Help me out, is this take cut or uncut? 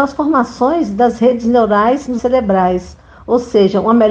cut